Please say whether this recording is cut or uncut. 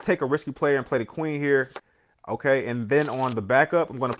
uncut